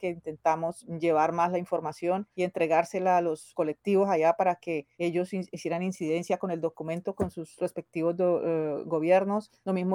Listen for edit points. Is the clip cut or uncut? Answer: uncut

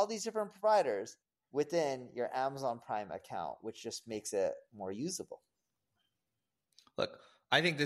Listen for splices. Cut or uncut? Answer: uncut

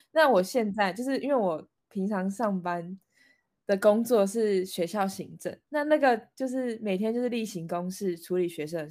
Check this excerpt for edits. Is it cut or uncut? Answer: uncut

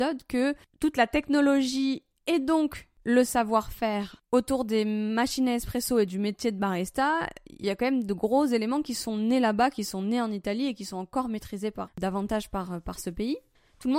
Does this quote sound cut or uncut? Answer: cut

